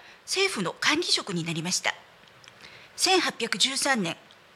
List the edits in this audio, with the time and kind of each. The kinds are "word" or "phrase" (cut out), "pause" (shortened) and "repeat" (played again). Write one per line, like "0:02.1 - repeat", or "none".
0:02.8 - pause